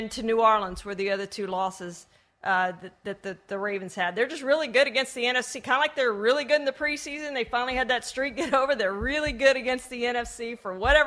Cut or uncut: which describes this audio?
uncut